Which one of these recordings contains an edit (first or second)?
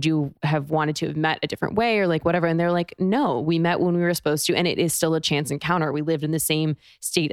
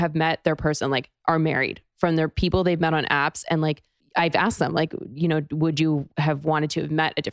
second